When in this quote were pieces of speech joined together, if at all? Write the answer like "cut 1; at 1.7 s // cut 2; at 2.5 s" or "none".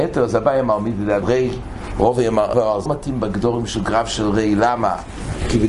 cut 1; at 1.2 s // cut 2; at 2.5 s // cut 3; at 2.9 s